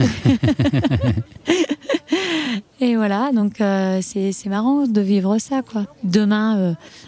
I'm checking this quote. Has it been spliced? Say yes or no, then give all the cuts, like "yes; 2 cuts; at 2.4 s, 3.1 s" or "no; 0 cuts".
no; 0 cuts